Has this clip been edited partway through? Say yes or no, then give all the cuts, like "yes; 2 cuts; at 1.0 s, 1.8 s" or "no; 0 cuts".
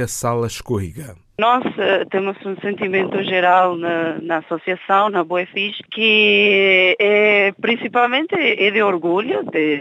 no; 0 cuts